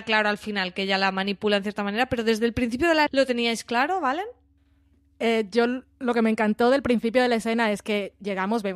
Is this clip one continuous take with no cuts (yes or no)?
no